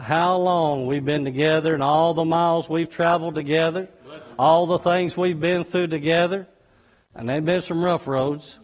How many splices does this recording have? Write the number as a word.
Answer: zero